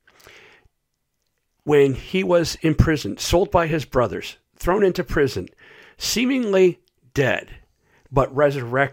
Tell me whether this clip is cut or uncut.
uncut